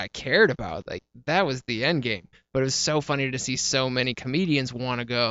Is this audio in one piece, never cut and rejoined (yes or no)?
yes